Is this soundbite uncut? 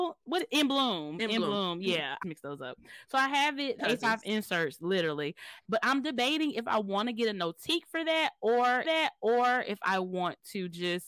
no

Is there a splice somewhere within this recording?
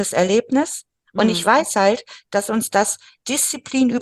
no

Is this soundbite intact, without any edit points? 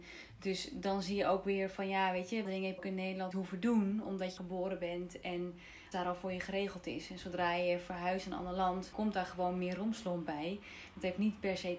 no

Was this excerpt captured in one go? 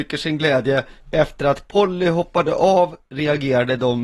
no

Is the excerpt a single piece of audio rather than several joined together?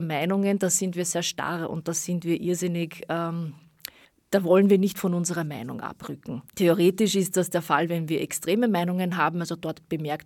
no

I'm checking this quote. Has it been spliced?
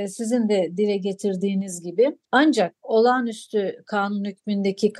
yes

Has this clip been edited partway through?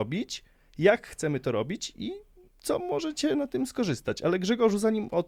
no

